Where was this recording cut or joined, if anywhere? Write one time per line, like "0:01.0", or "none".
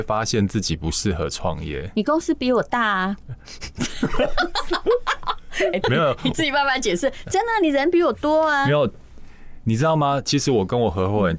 0:05.8